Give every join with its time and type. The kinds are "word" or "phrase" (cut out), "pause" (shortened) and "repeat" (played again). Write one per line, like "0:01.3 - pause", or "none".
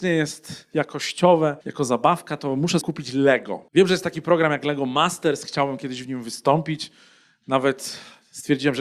0:01.6 - pause
0:02.8 - word
0:03.7 - pause